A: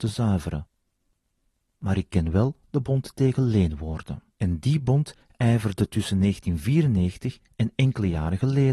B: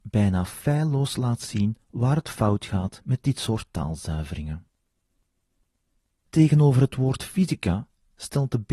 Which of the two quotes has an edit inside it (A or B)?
A